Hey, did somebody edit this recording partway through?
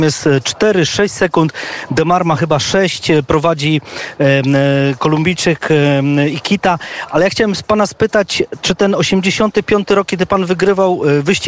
no; 0 cuts

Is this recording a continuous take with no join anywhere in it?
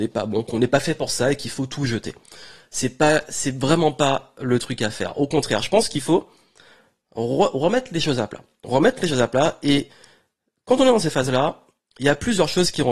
yes; 0 cuts

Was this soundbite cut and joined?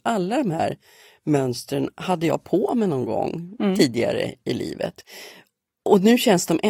no; 0 cuts

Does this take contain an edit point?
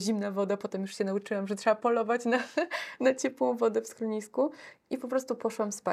no; 0 cuts

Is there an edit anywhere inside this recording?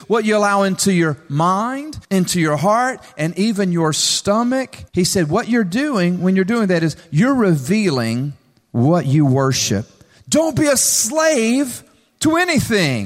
yes; 2 cuts; at 2.0 s, 4.9 s

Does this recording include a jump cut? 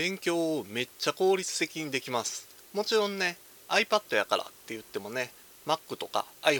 no; 0 cuts

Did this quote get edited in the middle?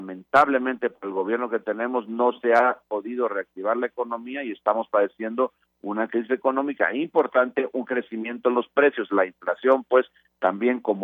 no; 0 cuts

